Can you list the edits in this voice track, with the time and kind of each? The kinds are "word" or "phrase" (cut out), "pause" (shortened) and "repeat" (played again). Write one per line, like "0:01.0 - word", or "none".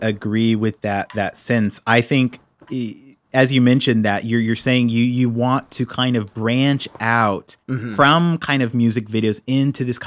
none